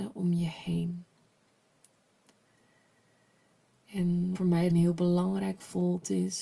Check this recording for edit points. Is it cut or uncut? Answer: cut